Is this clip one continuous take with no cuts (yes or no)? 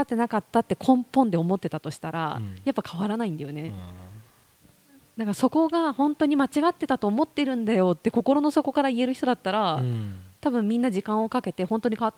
yes